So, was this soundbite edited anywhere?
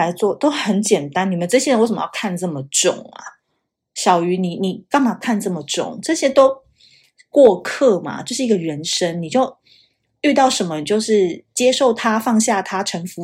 no; 0 cuts

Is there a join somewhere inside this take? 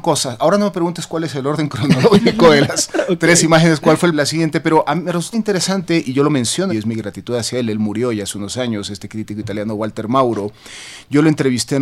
yes; 3 cuts; at 4.1 s, 5.3 s, 6.7 s

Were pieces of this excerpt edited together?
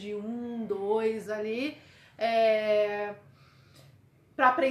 yes; 1 cut; at 1.3 s

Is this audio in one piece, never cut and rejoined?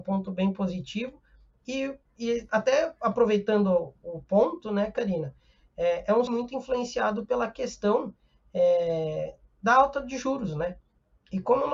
no; 1 cut; at 6.3 s

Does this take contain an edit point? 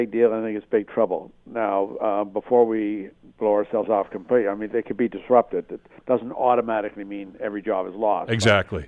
no; 0 cuts

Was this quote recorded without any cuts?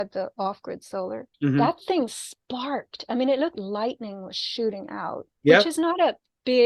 no; 3 cuts; at 1.3 s, 3.5 s, 5.3 s

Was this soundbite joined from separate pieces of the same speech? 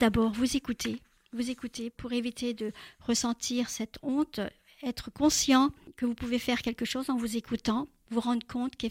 no; 0 cuts

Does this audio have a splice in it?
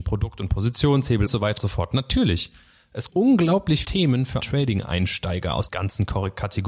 yes; 6 cuts; at 1.3 s, 1.6 s, 3.1 s, 3.8 s, 4.4 s, 5.7 s

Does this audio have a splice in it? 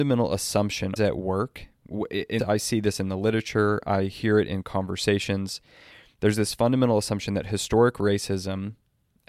yes; 2 cuts; at 1.0 s, 2.4 s

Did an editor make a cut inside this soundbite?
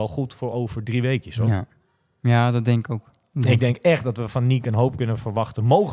no; 0 cuts

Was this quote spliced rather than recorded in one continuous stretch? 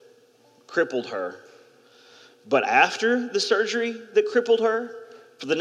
no; 0 cuts

